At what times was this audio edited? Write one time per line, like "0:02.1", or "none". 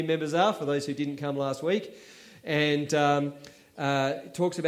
none